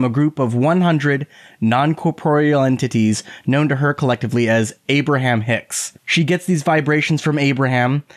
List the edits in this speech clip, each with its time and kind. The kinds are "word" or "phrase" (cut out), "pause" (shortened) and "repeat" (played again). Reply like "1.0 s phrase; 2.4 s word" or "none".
6.0 s pause